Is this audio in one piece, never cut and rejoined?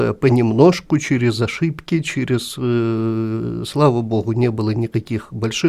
yes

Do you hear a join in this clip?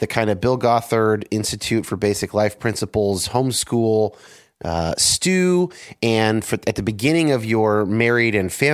no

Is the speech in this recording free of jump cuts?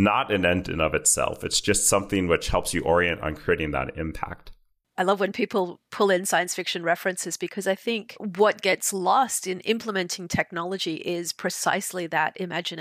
yes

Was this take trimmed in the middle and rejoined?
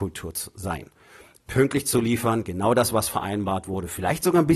no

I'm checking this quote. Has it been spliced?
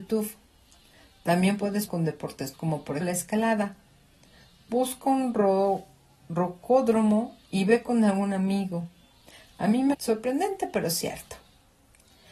yes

